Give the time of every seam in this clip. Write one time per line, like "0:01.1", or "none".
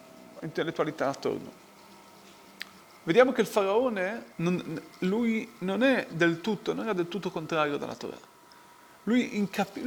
0:02.8
0:04.3